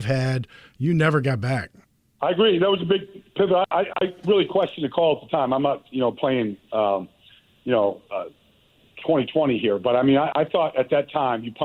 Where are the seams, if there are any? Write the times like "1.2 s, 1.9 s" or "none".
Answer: 1.8 s

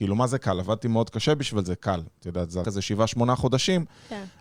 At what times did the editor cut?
2.6 s

